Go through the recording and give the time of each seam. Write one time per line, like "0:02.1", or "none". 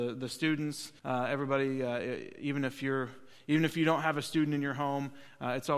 0:01.0